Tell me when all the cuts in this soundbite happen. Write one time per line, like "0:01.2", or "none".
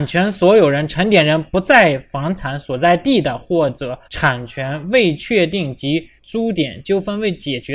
0:04.0
0:06.2